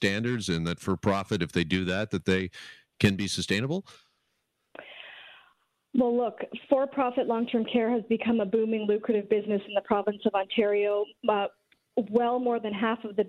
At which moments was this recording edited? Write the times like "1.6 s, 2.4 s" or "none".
none